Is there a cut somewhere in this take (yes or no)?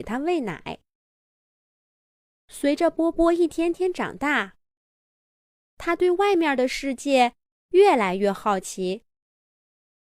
no